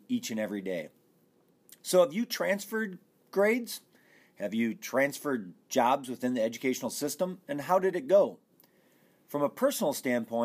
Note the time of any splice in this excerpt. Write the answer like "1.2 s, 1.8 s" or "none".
none